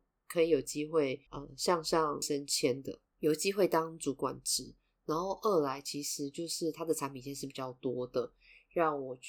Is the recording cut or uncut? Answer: cut